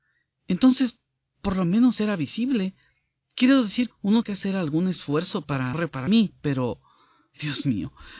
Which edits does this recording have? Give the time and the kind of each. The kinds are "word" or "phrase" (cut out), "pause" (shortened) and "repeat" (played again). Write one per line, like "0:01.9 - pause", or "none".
0:03.9 - word
0:04.2 - word
0:05.7 - word
0:06.1 - word